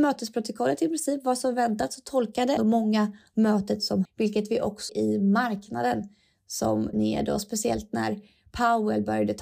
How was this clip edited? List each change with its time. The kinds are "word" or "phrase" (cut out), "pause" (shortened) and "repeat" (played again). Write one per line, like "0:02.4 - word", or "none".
0:02.6 - word
0:04.0 - word
0:04.9 - word
0:06.9 - word